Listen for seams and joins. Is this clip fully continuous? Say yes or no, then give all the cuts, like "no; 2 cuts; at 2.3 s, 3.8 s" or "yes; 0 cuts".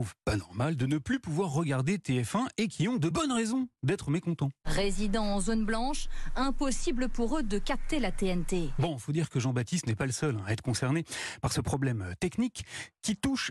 yes; 0 cuts